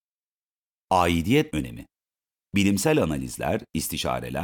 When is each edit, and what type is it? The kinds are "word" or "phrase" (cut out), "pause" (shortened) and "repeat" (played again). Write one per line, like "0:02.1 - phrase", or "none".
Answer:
0:01.5 - word